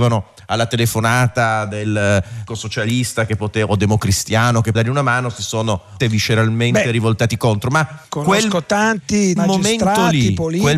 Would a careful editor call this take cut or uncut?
cut